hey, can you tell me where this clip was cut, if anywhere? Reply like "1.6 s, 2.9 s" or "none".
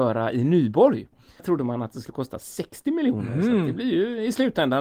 1.4 s